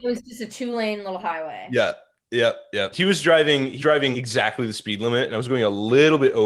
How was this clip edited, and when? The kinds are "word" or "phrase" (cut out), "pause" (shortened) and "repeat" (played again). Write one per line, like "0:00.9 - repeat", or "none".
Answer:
0:02.9 - word
0:03.8 - word
0:04.1 - word